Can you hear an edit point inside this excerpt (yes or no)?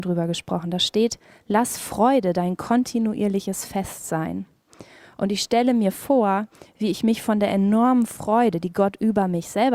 no